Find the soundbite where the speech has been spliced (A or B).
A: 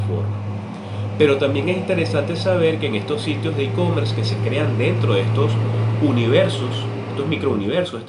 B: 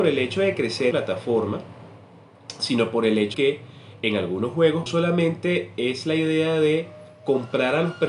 B